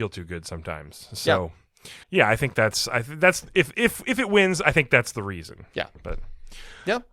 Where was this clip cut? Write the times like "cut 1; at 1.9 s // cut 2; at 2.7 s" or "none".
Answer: cut 1; at 2.0 s // cut 2; at 5.9 s